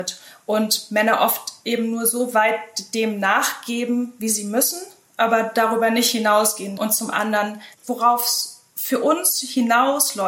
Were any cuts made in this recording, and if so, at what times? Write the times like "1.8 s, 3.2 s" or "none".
none